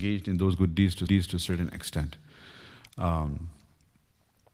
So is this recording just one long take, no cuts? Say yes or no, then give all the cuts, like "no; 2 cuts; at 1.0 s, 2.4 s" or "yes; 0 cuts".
no; 1 cut; at 1.1 s